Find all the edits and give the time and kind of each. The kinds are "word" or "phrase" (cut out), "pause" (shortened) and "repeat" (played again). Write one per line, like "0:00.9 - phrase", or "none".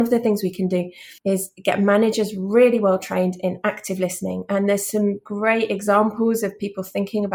0:01.2 - pause